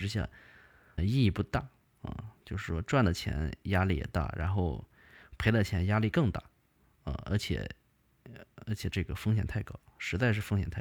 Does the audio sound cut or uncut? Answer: cut